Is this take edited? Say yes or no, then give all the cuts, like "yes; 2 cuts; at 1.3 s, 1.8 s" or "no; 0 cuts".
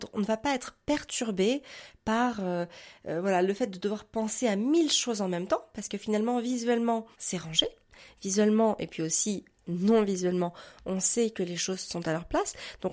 yes; 1 cut; at 7.1 s